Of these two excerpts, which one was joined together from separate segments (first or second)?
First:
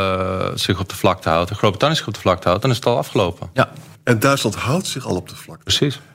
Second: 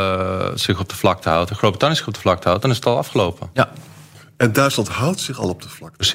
first